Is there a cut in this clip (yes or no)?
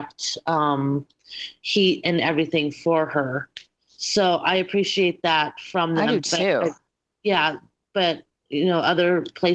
no